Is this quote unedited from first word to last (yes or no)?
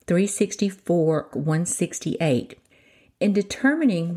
no